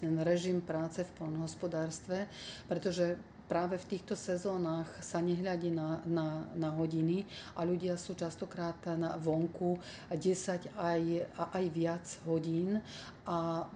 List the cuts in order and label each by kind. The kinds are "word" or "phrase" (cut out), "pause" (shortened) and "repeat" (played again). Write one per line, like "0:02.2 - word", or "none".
none